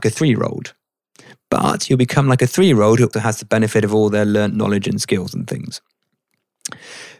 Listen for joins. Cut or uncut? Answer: cut